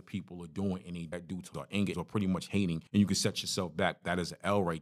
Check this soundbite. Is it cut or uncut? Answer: cut